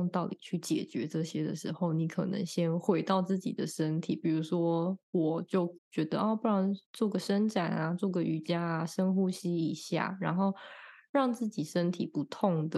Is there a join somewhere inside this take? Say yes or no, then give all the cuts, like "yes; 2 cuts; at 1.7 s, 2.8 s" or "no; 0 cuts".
yes; 1 cut; at 5.8 s